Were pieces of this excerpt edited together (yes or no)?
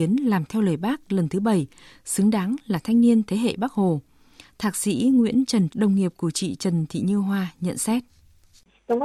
yes